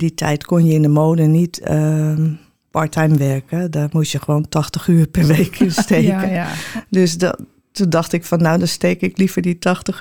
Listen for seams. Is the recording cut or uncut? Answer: uncut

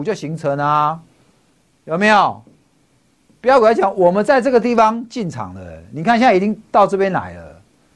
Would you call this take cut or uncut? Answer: uncut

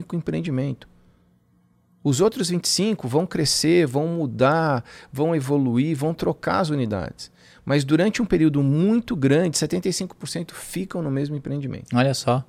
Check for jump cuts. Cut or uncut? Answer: uncut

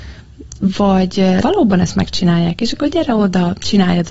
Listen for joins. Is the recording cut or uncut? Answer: cut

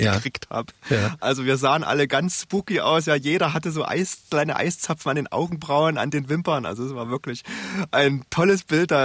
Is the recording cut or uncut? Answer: uncut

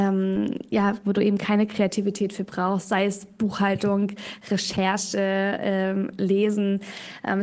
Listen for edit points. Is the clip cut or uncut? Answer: uncut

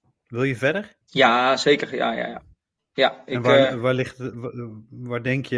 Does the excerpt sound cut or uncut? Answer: cut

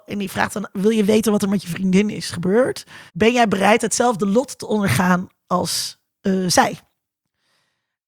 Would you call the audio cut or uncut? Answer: cut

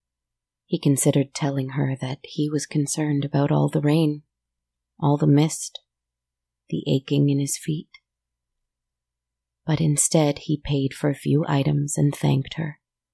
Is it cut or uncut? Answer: uncut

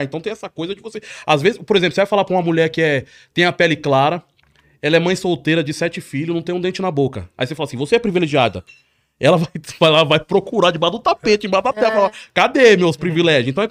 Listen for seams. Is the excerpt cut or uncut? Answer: uncut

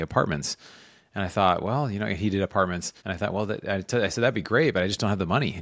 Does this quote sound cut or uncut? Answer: cut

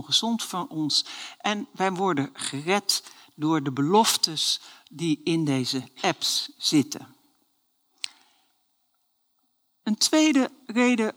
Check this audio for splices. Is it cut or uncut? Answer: uncut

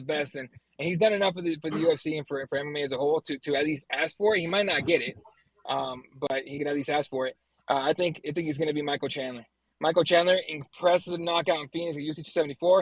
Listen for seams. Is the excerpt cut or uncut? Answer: uncut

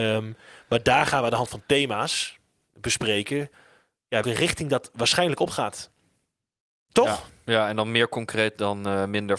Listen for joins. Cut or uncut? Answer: cut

